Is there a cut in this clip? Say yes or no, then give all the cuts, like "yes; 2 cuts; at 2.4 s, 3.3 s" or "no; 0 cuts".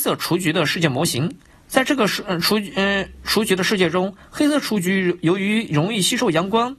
yes; 1 cut; at 1.5 s